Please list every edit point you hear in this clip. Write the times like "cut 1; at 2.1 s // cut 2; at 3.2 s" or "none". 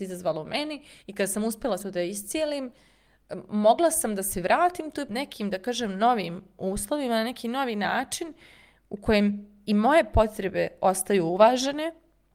cut 1; at 1.0 s // cut 2; at 1.8 s // cut 3; at 5.1 s

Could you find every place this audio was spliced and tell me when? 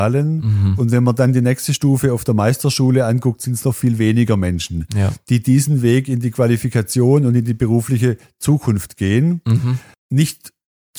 cut 1; at 9.9 s

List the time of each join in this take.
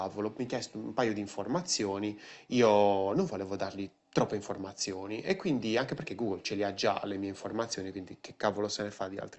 cut 1; at 4.0 s

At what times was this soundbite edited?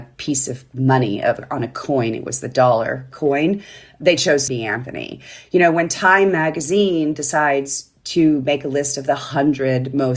cut 1; at 4.5 s

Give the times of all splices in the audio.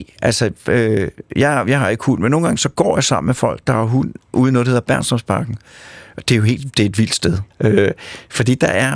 cut 1; at 7.5 s

